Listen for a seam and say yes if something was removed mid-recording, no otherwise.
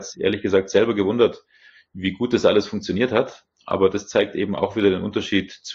no